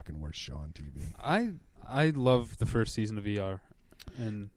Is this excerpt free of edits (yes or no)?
no